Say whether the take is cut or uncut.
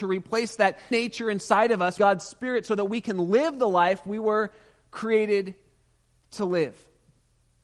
cut